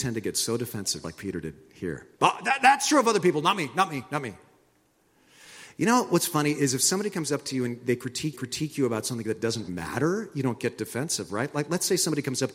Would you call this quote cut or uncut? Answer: cut